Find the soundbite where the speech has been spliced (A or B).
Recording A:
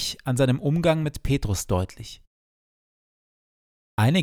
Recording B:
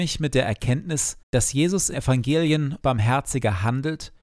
B